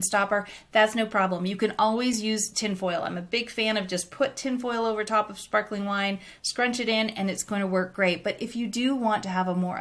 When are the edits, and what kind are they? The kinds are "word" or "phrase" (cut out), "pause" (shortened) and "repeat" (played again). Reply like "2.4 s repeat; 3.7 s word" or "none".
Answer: none